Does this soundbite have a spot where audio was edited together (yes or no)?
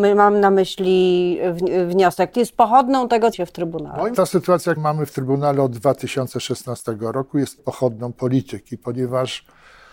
yes